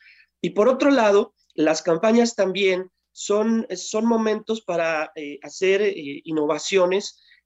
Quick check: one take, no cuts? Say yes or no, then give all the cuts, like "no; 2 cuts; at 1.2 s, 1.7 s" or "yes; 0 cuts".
no; 1 cut; at 1.6 s